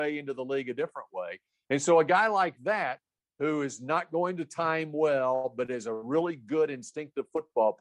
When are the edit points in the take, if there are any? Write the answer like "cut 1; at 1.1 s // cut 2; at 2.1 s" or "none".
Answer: none